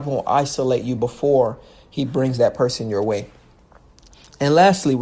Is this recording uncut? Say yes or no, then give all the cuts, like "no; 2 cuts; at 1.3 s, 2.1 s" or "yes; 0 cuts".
yes; 0 cuts